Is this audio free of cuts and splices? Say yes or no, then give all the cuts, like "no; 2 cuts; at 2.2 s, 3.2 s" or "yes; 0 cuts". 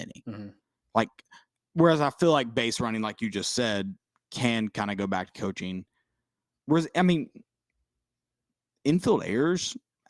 yes; 0 cuts